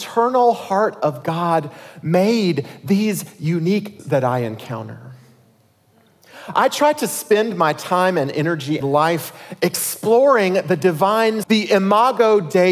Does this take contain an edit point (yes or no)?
yes